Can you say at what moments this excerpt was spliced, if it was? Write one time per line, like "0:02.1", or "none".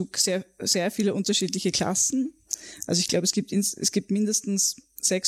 none